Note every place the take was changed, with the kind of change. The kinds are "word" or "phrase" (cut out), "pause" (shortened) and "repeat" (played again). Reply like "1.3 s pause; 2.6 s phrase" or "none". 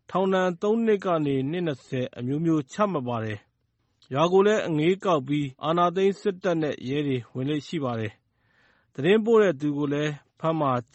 5.5 s pause